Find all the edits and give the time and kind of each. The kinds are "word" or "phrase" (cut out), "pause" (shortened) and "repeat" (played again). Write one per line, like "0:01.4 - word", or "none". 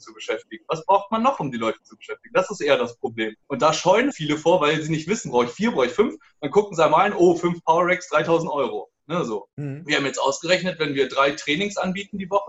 0:03.4 - pause
0:04.1 - word
0:09.0 - pause
0:09.5 - pause